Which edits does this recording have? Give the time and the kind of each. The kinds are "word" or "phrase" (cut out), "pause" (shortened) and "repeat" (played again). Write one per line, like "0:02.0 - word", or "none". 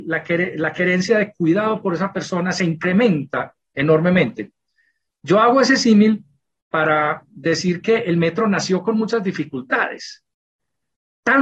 none

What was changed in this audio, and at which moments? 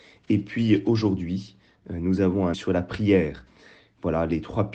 0:02.5 - word

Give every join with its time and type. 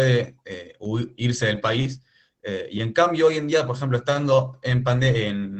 none

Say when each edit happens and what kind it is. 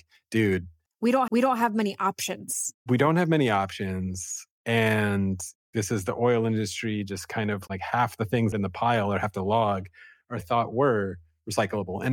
0:01.3 - repeat
0:08.5 - phrase
0:10.4 - phrase

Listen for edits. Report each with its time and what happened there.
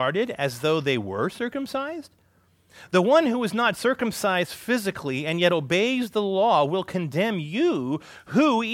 none

